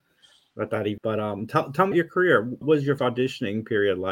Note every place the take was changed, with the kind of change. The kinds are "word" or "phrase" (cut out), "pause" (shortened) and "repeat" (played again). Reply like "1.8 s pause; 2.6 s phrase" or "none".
1.0 s word; 1.9 s word; 2.6 s word; 3.0 s word